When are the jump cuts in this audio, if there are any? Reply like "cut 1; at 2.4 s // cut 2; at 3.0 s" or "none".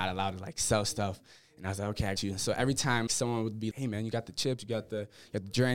cut 1; at 2.2 s // cut 2; at 3.1 s // cut 3; at 3.7 s